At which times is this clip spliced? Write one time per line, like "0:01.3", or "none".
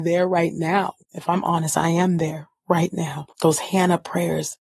0:01.0
0:03.3